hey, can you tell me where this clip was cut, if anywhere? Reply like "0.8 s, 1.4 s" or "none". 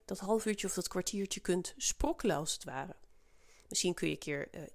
none